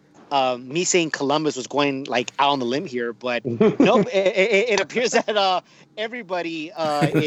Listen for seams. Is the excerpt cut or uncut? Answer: uncut